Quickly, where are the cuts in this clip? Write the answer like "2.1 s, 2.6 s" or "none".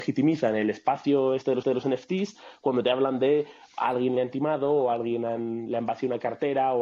1.6 s